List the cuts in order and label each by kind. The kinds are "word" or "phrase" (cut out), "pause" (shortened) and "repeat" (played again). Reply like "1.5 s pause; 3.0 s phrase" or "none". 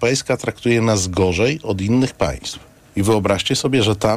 none